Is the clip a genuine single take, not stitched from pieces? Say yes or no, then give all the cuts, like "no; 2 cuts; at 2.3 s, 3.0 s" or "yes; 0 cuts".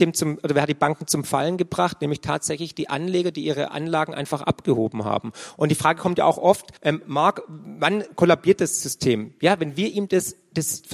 no; 1 cut; at 6.8 s